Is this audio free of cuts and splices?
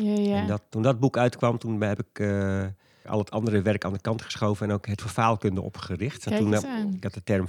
no; 2 cuts; at 3.0 s, 5.0 s

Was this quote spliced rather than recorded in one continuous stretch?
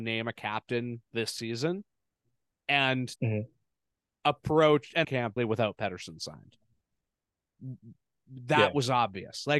yes; 4 cuts; at 1.1 s, 3.2 s, 5.0 s, 5.4 s

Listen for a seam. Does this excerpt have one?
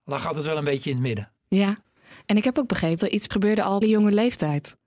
yes; 3 cuts; at 3.0 s, 3.3 s, 3.8 s

